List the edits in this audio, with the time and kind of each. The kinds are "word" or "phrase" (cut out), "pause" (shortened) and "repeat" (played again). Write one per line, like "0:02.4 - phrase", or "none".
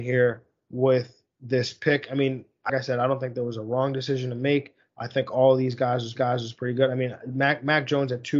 0:02.7 - word
0:06.2 - repeat